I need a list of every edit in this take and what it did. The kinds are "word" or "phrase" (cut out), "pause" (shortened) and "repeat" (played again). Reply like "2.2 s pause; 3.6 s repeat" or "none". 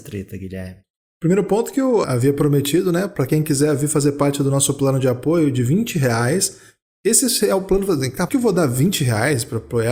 2.0 s word; 8.3 s word